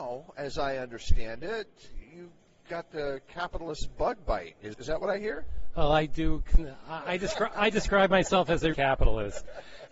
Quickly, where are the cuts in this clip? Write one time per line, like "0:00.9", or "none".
0:02.0
0:02.4
0:04.7
0:07.5
0:08.7